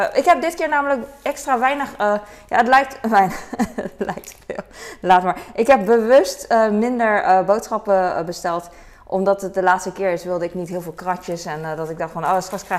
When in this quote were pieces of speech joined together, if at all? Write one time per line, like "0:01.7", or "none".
none